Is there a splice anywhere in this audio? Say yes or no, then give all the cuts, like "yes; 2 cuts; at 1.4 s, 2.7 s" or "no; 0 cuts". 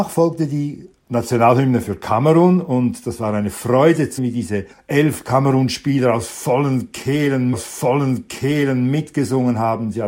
yes; 3 cuts; at 4.2 s, 4.7 s, 7.5 s